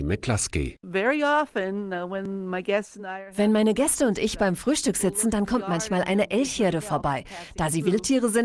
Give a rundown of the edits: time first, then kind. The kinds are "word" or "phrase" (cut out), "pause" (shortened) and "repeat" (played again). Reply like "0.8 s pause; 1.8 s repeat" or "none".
none